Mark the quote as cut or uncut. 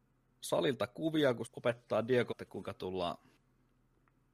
cut